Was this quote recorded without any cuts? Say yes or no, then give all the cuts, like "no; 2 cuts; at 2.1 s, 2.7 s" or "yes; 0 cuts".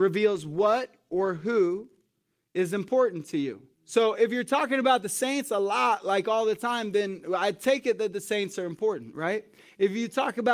no; 1 cut; at 3.7 s